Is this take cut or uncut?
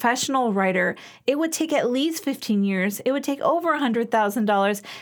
uncut